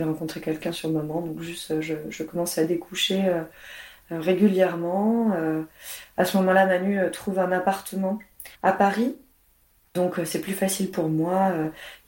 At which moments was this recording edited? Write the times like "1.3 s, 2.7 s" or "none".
8.5 s

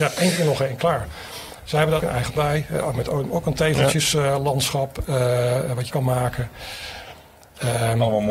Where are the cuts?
2.0 s, 2.4 s, 5.9 s

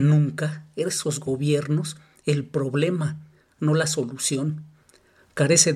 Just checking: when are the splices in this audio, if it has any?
none

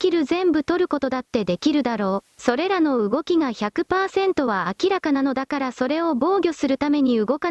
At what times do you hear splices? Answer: 2.3 s

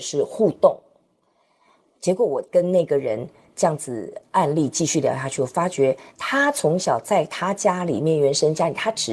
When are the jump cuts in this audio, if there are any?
6.1 s

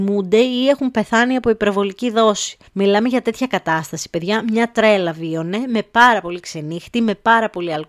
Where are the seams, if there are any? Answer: 2.7 s

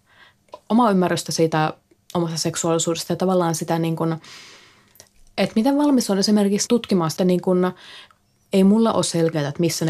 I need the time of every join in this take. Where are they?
7.2 s

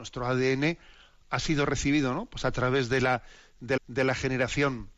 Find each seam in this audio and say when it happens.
3.8 s

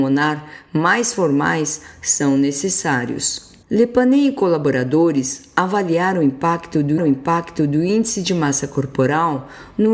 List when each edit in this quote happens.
3.6 s, 7.0 s

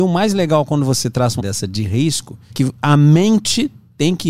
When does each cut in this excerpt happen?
1.4 s, 2.5 s

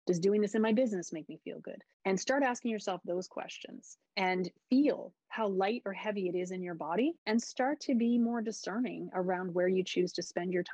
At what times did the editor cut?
1.9 s, 4.1 s, 7.2 s

